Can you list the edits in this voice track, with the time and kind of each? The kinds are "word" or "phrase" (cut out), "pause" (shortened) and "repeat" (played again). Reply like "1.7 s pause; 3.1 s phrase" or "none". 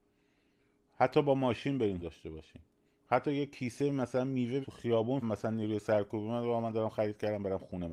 2.0 s word; 2.8 s pause; 4.6 s phrase; 5.2 s phrase